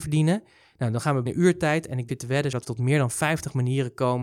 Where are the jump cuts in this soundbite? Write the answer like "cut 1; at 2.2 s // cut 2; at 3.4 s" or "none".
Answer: cut 1; at 1.3 s // cut 2; at 2.1 s // cut 3; at 2.6 s